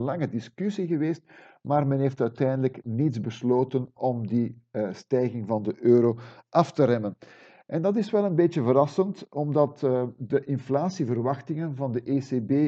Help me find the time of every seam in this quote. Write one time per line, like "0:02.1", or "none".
none